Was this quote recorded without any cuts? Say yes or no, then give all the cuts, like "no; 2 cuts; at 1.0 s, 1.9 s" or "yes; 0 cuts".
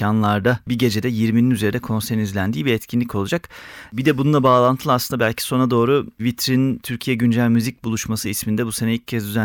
yes; 0 cuts